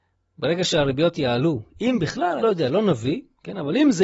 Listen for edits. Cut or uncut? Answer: cut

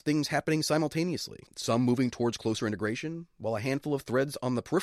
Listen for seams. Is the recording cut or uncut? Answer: cut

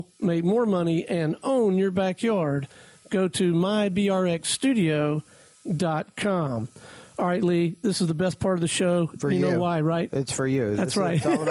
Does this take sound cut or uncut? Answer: uncut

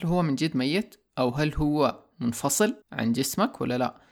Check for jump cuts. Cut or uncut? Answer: cut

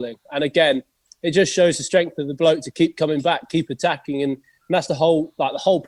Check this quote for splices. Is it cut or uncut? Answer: uncut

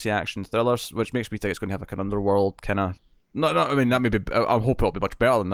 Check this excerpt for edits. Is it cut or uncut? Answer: uncut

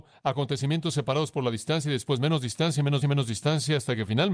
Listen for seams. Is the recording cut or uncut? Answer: cut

